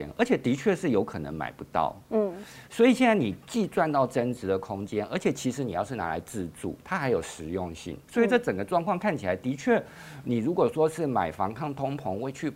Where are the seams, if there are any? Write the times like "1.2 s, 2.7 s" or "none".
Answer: 8.0 s